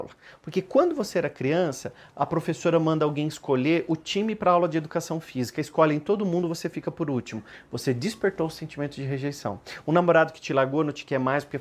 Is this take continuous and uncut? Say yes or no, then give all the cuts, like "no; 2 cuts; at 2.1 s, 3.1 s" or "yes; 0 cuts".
yes; 0 cuts